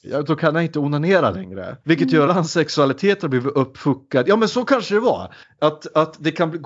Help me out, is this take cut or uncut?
cut